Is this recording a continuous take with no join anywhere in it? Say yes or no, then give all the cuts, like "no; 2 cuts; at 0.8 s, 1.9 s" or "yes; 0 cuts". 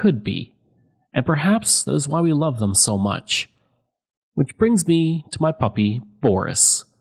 yes; 0 cuts